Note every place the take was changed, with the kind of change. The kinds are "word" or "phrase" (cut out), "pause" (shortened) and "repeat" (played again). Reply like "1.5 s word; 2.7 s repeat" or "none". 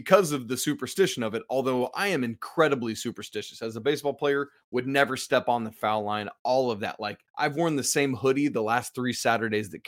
7.3 s pause